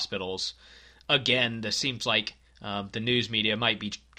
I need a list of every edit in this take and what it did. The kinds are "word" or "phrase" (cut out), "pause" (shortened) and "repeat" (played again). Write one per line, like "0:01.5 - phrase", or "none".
0:02.5 - pause